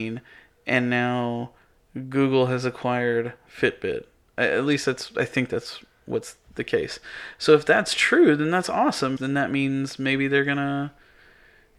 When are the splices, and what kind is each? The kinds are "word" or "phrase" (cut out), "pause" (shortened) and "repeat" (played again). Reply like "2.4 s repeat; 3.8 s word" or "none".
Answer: 9.2 s word